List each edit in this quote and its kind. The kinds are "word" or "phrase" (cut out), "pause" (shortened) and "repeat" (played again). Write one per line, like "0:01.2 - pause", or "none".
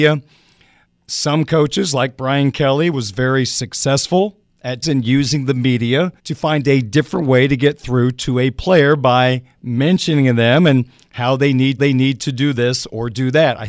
0:04.8 - word
0:06.2 - pause
0:11.8 - repeat